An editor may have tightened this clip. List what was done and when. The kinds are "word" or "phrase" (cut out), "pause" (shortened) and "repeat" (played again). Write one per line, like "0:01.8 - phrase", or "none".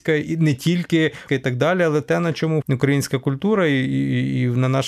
0:01.3 - word
0:02.0 - word
0:02.6 - word